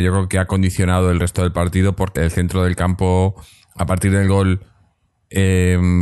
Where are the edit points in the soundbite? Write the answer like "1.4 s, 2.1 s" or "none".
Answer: 2.2 s